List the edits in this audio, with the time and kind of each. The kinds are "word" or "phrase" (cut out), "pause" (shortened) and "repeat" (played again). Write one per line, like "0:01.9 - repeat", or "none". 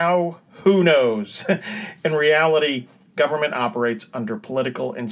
none